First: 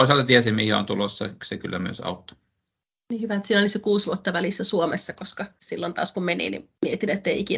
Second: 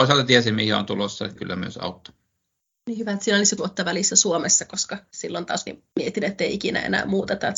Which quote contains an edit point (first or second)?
second